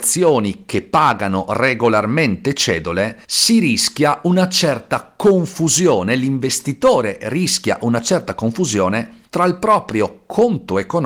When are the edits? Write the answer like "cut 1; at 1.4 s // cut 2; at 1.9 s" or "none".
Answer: cut 1; at 3.2 s // cut 2; at 9.3 s